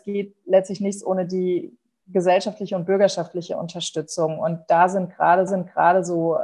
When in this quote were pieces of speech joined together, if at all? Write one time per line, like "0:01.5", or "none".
0:05.5